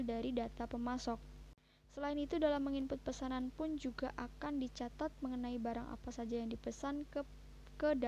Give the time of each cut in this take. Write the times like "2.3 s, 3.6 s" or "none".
none